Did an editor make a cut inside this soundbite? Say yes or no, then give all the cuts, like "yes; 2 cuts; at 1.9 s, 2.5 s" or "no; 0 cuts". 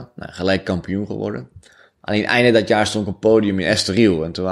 no; 0 cuts